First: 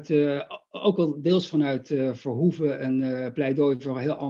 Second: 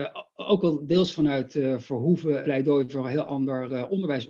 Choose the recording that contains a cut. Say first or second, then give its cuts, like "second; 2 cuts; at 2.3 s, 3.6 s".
second; 1 cut; at 2.4 s